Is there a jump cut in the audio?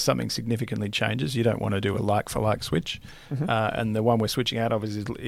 no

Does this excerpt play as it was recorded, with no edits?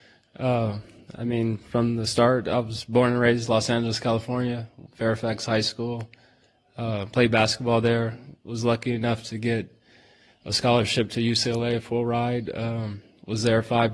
yes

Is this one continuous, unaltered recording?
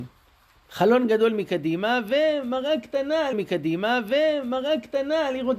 no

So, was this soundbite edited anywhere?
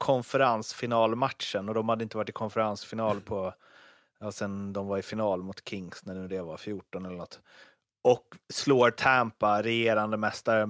no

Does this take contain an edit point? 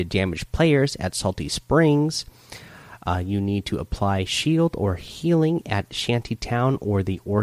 no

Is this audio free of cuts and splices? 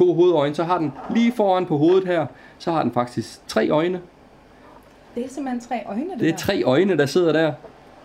yes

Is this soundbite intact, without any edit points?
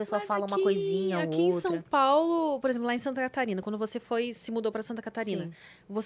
yes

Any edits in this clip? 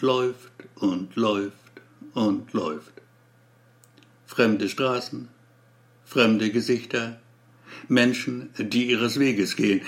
no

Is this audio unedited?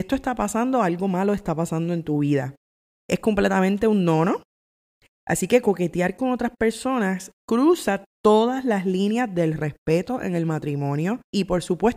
yes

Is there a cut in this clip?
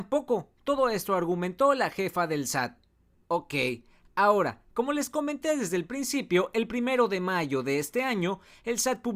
no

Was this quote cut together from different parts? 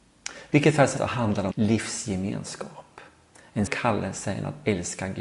yes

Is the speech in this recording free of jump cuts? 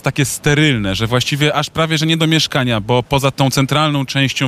yes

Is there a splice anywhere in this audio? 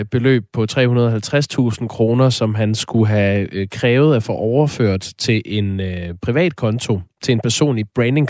no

